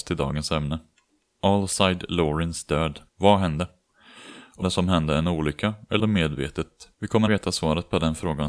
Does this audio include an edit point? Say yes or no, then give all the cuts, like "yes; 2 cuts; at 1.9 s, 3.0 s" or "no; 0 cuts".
yes; 5 cuts; at 3.1 s, 4.6 s, 6.0 s, 6.9 s, 7.3 s